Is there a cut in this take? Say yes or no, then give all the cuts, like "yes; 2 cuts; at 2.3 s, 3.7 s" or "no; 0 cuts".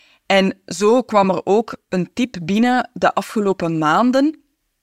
no; 0 cuts